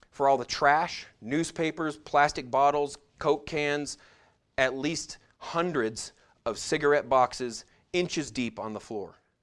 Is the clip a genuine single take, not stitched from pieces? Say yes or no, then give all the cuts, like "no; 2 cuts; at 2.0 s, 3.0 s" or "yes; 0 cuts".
yes; 0 cuts